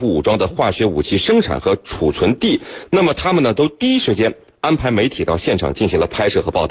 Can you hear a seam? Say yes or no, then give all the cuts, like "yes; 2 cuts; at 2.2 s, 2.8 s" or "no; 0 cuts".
no; 0 cuts